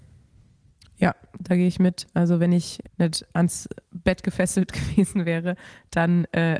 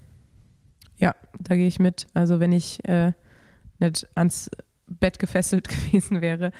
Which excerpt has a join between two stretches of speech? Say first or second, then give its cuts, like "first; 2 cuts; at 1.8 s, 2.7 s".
first; 2 cuts; at 2.8 s, 3.8 s